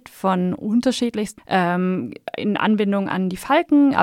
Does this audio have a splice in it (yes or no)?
yes